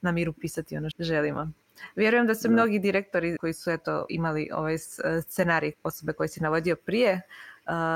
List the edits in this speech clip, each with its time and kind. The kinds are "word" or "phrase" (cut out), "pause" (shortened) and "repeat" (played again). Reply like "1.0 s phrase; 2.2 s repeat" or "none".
0.9 s word; 3.4 s word; 4.1 s word; 5.7 s word